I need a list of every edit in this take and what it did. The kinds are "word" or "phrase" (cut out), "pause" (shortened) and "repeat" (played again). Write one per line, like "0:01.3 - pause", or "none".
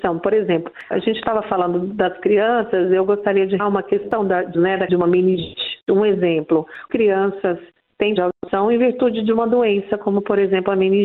0:00.9 - word
0:03.6 - word
0:04.5 - word
0:04.9 - word
0:06.9 - word
0:08.2 - word